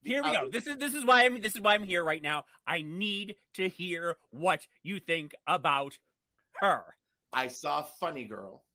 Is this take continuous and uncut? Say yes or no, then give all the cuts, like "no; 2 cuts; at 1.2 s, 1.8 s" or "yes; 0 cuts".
yes; 0 cuts